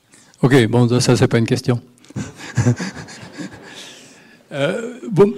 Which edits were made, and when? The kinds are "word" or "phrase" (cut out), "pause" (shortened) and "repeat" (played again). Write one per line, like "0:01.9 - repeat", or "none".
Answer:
none